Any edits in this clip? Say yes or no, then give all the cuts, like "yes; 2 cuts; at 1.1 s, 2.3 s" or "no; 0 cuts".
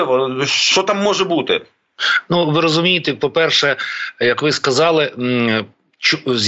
no; 0 cuts